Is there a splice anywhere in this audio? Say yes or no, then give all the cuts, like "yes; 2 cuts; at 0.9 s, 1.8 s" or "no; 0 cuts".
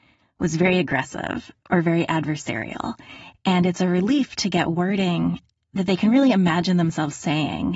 no; 0 cuts